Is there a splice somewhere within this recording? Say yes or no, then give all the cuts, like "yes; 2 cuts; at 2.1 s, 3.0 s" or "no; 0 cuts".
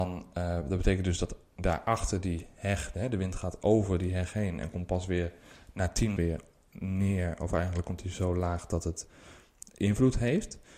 yes; 1 cut; at 6.2 s